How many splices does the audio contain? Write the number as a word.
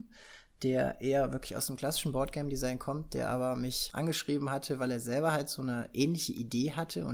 one